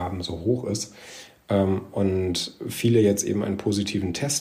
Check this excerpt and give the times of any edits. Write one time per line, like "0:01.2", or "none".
none